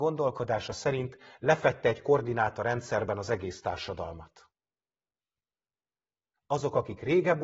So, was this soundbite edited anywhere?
no; 0 cuts

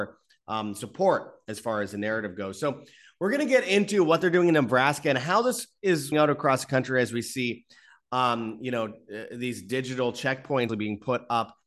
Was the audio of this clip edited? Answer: yes; 2 cuts; at 6.1 s, 10.7 s

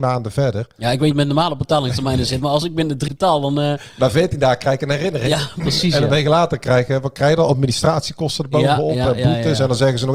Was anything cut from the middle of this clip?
yes; 3 cuts; at 1.1 s, 2.6 s, 3.1 s

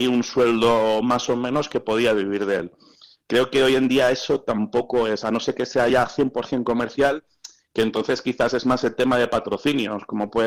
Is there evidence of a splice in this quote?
no; 0 cuts

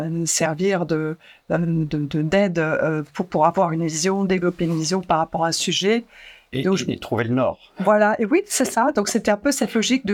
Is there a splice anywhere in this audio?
no; 0 cuts

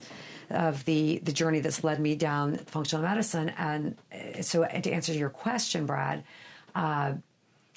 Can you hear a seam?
no; 0 cuts

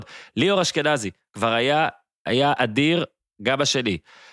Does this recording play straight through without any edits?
yes; 0 cuts

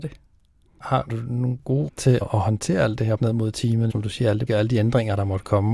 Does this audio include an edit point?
yes; 6 cuts; at 1.1 s, 1.9 s, 2.2 s, 3.2 s, 3.9 s, 4.5 s

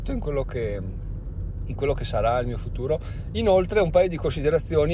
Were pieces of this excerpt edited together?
no; 0 cuts

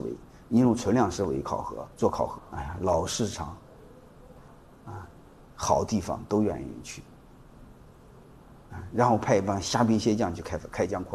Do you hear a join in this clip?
yes; 2 cuts; at 1.9 s, 2.4 s

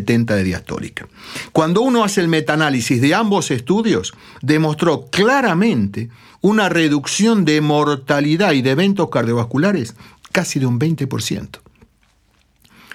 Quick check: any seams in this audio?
no; 0 cuts

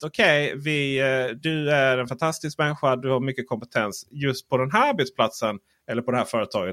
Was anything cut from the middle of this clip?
no; 0 cuts

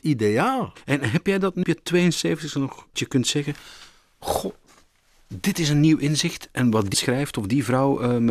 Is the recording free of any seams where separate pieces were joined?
no; 3 cuts; at 1.6 s, 2.9 s, 6.9 s

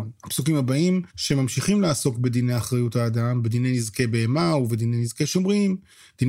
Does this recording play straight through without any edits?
no; 1 cut; at 1.1 s

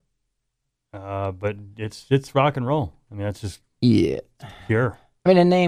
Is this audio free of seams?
yes; 0 cuts

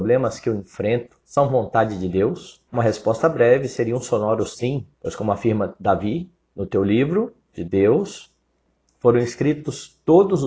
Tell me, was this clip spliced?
yes; 4 cuts; at 1.3 s, 2.7 s, 4.9 s, 6.4 s

